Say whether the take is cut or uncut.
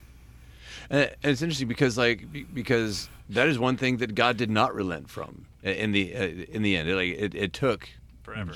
cut